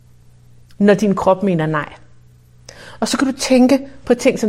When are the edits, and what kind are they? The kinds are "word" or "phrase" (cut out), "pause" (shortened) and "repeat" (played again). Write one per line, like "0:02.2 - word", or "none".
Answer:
none

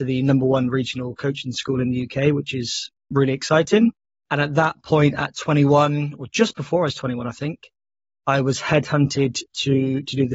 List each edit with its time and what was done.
0:04.0 - pause

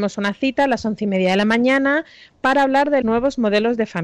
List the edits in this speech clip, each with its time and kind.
0:03.0 - word

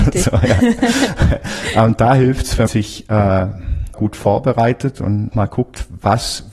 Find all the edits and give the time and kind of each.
0:02.7 - word
0:03.9 - word
0:05.3 - word

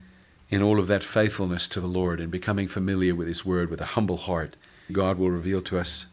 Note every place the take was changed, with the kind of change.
0:04.9 - word

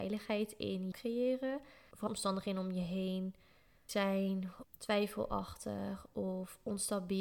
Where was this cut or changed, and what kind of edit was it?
0:00.9 - word
0:02.1 - word
0:03.9 - word
0:04.6 - word

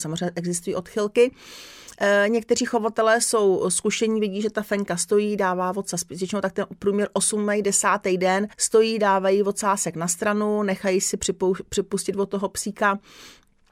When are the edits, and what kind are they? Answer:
0:08.5 - pause

